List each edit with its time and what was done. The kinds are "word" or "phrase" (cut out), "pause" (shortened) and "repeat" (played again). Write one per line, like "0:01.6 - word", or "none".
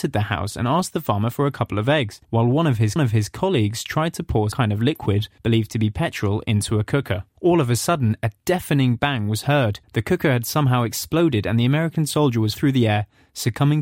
0:02.2 - pause
0:03.0 - repeat
0:04.5 - word
0:05.4 - pause
0:07.3 - pause
0:09.8 - pause
0:12.6 - word